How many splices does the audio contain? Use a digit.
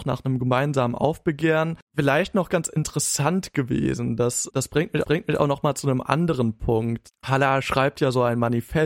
2